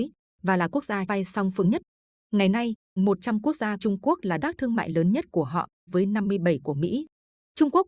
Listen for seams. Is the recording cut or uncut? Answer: cut